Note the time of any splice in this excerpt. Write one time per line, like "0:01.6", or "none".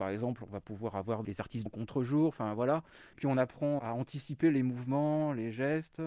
0:01.2
0:01.7
0:03.8